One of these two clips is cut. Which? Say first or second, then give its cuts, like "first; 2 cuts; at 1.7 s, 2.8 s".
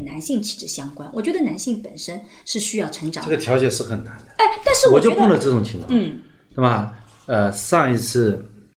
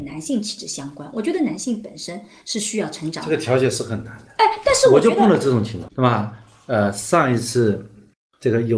second; 1 cut; at 5.9 s